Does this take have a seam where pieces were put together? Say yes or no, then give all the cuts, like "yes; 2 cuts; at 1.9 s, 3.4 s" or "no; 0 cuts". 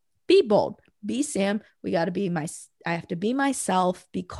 no; 0 cuts